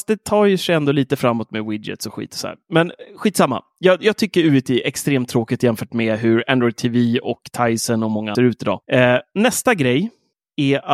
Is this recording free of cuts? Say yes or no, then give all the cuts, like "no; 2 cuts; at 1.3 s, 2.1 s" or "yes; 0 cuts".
no; 2 cuts; at 8.4 s, 8.8 s